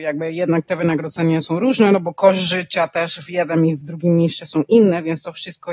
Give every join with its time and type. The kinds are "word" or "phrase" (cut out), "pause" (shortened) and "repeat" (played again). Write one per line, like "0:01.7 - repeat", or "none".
0:01.4 - word